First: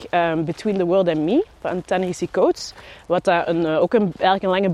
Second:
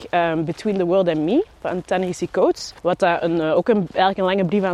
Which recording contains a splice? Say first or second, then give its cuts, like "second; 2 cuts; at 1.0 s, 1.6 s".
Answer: second; 1 cut; at 2.8 s